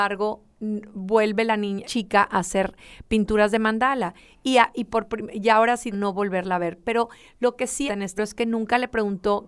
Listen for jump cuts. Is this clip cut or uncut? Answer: cut